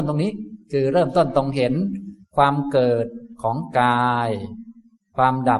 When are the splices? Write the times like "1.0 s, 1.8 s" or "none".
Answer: 2.2 s